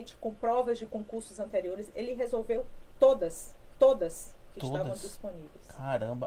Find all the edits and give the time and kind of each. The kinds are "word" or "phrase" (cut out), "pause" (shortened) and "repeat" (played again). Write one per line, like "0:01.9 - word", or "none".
0:03.7 - repeat